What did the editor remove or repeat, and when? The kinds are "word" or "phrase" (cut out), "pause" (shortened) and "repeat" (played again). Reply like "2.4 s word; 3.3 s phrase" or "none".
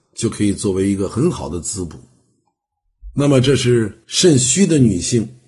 4.0 s pause